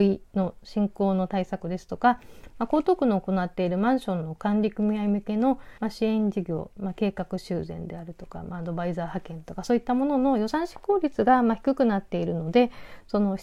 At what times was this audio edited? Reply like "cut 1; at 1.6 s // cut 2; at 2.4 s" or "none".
cut 1; at 5.8 s